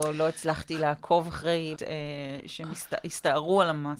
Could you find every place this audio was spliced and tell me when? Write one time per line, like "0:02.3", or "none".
0:01.8